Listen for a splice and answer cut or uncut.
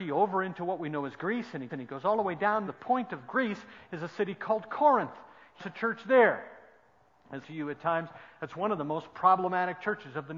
cut